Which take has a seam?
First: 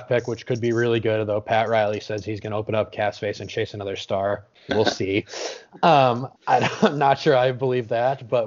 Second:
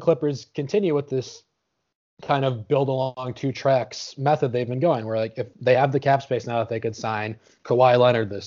first; 1 cut; at 6.4 s

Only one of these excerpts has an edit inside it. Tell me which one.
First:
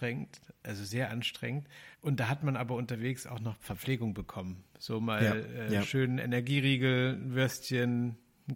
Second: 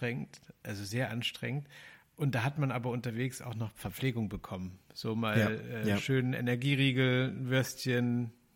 first; 1 cut; at 1.9 s

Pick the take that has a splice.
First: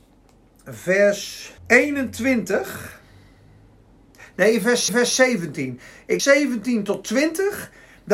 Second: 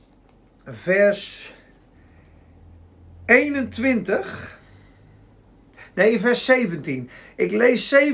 first; 3 cuts; at 1.6 s, 4.9 s, 6.2 s

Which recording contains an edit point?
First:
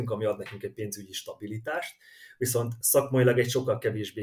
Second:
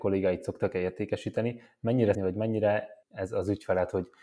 second; 2 cuts; at 2.1 s, 3.0 s

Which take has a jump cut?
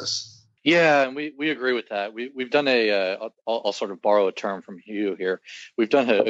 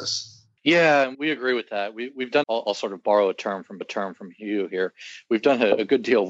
second; 3 cuts; at 1.1 s, 2.4 s, 3.8 s

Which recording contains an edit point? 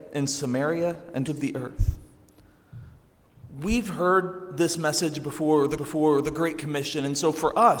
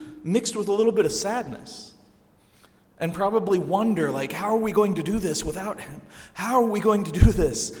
first; 2 cuts; at 1.3 s, 5.8 s

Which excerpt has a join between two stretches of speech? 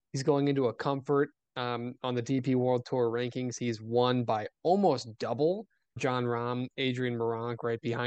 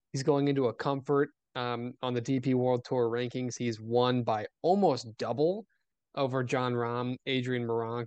first; 1 cut; at 6.0 s

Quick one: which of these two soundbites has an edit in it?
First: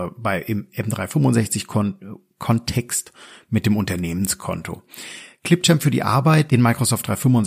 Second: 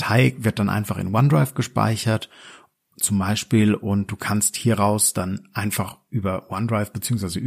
first; 1 cut; at 6.5 s

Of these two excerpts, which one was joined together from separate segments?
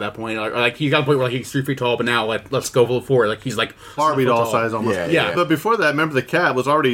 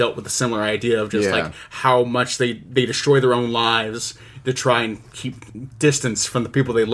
first; 2 cuts; at 4.0 s, 5.3 s

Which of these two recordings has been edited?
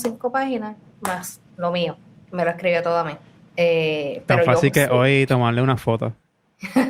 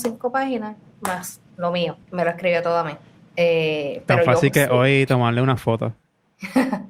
second; 1 cut; at 2.0 s

